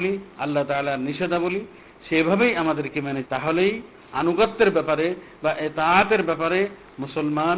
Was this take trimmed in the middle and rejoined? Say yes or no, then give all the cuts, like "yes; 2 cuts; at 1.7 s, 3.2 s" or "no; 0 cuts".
yes; 1 cut; at 3.2 s